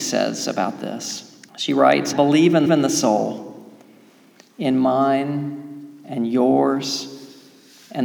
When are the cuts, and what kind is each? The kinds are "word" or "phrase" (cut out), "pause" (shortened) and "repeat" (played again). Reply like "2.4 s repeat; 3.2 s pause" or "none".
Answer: 1.5 s pause; 2.1 s word; 2.7 s repeat